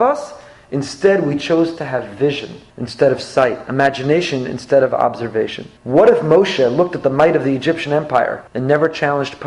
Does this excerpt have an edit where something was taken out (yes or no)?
yes